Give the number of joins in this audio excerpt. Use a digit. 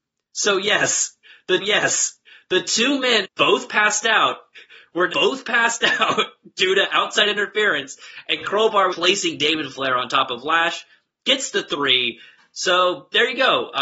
4